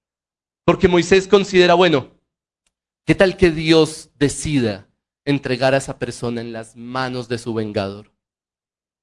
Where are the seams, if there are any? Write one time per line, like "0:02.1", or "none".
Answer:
none

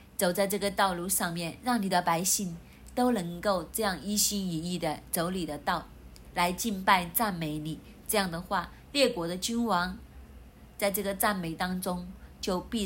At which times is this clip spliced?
none

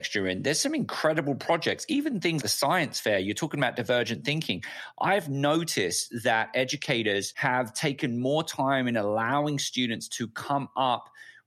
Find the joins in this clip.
0:02.4

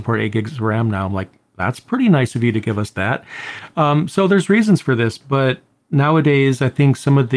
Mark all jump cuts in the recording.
none

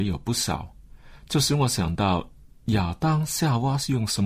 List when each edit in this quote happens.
none

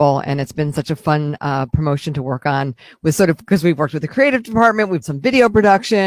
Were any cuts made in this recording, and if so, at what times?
0:05.0

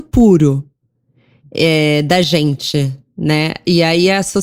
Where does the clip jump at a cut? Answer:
none

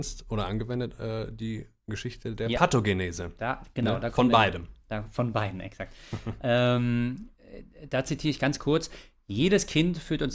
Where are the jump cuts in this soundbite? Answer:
none

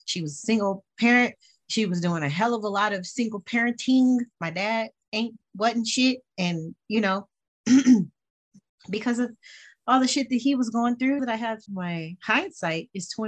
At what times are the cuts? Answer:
0:11.2
0:11.7

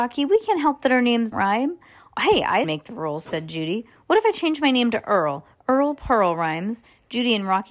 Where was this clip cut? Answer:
0:01.3
0:02.6

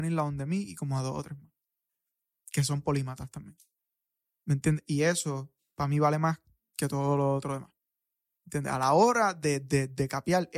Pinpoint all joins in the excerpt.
none

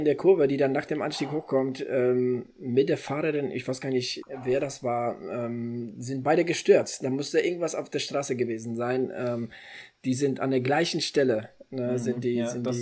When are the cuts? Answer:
0:04.2

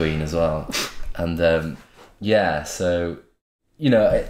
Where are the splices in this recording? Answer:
none

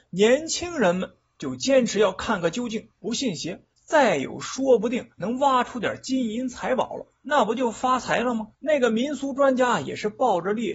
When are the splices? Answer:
0:02.9
0:03.7
0:05.1
0:08.5

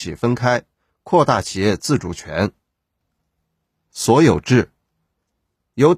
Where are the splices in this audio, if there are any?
none

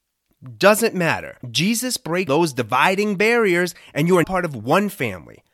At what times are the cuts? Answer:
0:01.4
0:02.3
0:04.2

